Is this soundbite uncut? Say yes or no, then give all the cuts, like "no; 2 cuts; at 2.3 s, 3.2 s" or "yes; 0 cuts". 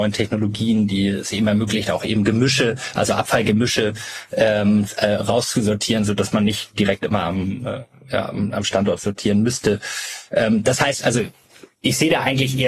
yes; 0 cuts